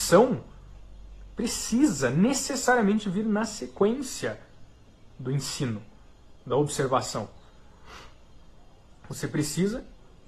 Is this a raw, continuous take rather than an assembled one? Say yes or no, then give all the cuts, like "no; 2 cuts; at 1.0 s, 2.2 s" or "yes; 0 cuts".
yes; 0 cuts